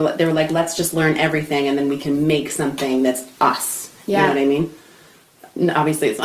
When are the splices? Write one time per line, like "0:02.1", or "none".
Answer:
none